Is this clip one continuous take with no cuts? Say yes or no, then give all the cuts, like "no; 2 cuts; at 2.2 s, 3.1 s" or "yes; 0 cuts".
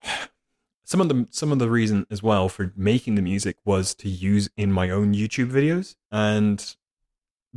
no; 1 cut; at 6.0 s